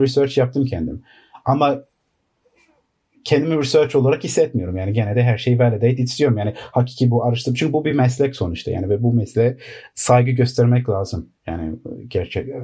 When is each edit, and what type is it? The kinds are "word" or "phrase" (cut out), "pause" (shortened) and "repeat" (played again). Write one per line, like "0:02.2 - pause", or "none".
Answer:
none

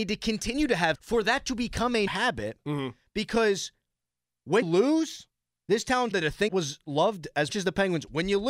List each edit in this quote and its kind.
0:00.9 - word
0:02.1 - word
0:04.6 - word
0:06.1 - word
0:06.5 - word
0:07.5 - word

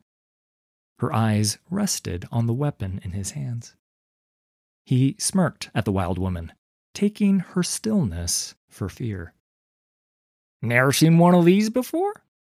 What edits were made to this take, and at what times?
none

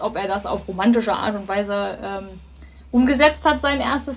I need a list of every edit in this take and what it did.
none

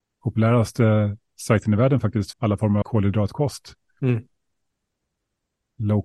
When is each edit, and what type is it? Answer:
0:02.3 - word
0:02.8 - phrase

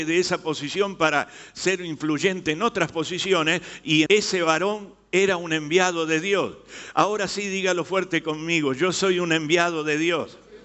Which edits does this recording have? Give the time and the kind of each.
0:04.1 - word

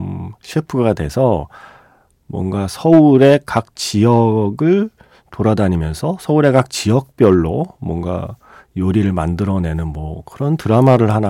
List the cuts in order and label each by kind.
none

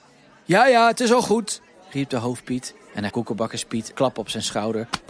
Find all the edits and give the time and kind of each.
0:03.1 - word
0:03.9 - word

